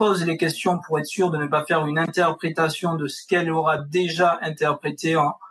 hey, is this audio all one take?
yes; 0 cuts

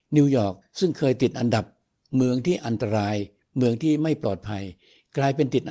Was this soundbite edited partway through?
no; 0 cuts

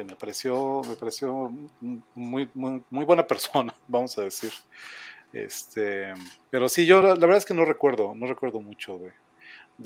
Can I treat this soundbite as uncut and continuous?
yes; 0 cuts

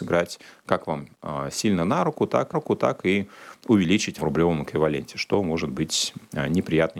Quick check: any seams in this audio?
yes; 2 cuts; at 2.5 s, 4.2 s

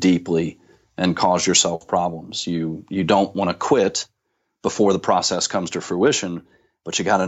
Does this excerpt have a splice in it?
no; 0 cuts

